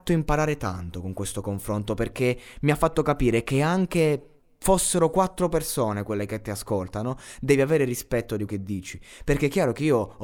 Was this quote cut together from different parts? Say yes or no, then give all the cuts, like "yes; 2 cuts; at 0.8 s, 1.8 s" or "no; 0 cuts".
yes; 1 cut; at 8.5 s